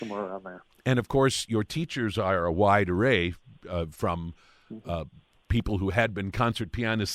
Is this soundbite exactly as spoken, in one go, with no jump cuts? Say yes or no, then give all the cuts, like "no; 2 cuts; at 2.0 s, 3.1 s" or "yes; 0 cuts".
yes; 0 cuts